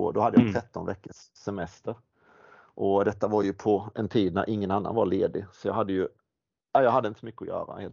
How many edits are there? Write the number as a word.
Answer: zero